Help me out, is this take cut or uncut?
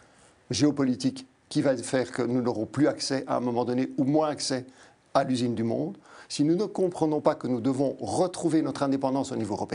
uncut